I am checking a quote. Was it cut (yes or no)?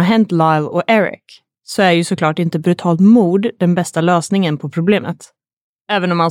no